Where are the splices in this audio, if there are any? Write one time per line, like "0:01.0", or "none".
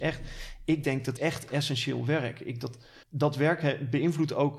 0:01.2
0:02.6
0:03.0